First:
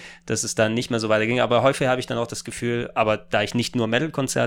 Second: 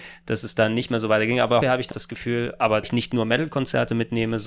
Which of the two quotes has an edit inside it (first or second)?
second